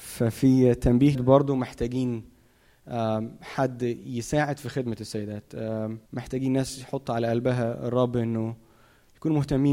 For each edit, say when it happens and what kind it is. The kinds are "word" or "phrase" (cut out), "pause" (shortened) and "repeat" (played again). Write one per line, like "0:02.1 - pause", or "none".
0:01.1 - word
0:06.0 - pause

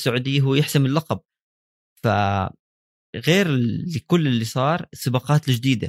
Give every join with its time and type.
none

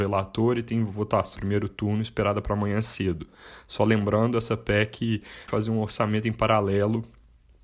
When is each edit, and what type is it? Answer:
0:01.4 - word
0:05.5 - word

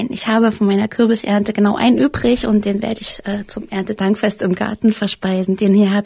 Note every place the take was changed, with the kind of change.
none

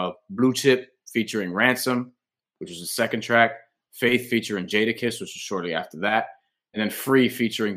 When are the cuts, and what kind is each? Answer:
none

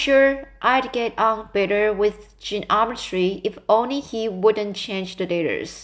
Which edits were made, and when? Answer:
none

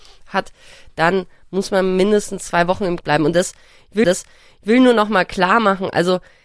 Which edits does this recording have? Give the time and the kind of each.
0:03.0 - word
0:04.0 - repeat

